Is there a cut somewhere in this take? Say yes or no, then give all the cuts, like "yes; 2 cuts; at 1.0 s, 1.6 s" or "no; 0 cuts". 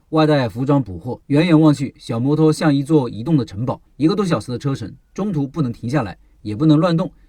yes; 2 cuts; at 1.2 s, 3.9 s